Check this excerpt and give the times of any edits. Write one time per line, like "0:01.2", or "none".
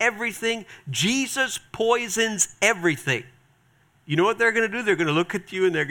none